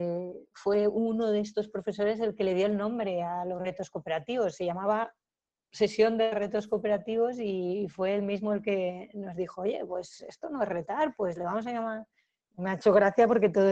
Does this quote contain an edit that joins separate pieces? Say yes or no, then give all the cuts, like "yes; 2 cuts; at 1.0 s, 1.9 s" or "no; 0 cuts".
no; 0 cuts